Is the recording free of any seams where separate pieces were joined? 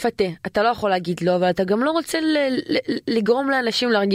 yes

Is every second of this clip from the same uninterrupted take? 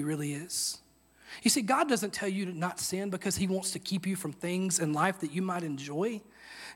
yes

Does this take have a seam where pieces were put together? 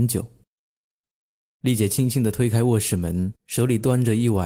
yes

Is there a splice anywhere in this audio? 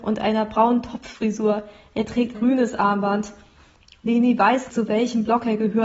yes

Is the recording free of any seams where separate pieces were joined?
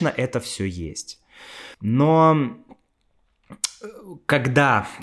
no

